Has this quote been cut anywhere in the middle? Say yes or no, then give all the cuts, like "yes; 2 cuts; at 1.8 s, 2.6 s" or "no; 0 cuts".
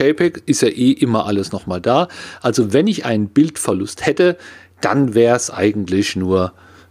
no; 0 cuts